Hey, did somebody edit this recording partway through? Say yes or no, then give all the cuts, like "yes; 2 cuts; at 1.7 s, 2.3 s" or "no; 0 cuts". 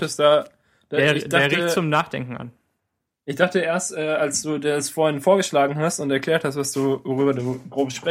no; 0 cuts